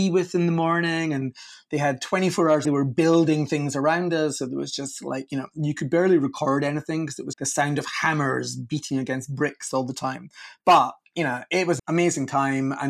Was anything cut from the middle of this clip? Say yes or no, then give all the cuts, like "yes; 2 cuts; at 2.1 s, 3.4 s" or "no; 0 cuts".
yes; 3 cuts; at 2.6 s, 7.3 s, 11.8 s